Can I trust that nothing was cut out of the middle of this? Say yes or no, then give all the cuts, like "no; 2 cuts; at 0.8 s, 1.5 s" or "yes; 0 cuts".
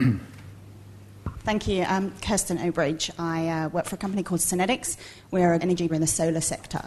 no; 2 cuts; at 5.6 s, 5.9 s